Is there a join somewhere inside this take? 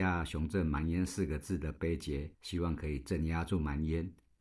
yes; 1 cut; at 2.3 s

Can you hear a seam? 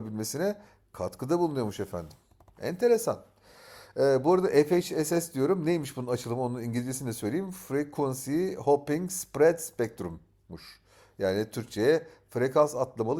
no; 0 cuts

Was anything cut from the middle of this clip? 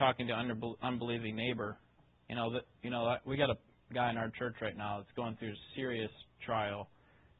no; 0 cuts

